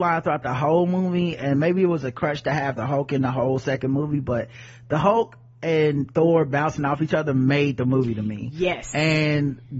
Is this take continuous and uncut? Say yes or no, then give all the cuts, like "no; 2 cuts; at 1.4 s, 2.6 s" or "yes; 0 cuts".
yes; 0 cuts